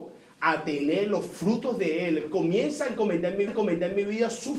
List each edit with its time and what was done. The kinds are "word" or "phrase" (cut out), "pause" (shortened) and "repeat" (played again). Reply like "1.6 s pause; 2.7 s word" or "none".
3.5 s repeat